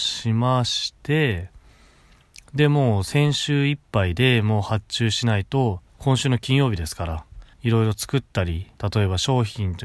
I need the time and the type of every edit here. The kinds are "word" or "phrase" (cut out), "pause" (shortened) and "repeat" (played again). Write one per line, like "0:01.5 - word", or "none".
0:05.9 - pause
0:07.5 - pause
0:08.8 - pause